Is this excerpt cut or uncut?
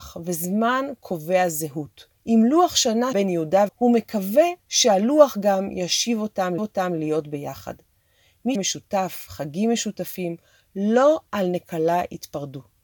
cut